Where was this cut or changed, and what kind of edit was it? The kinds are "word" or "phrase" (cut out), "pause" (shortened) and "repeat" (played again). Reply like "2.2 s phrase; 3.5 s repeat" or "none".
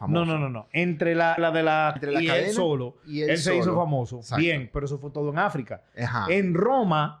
1.4 s word; 2.0 s word